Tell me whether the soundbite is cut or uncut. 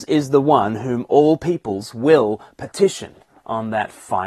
uncut